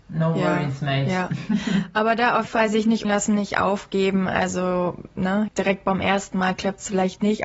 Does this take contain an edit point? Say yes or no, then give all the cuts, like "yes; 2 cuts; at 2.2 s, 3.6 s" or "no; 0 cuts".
yes; 3 cuts; at 2.5 s, 3.0 s, 5.5 s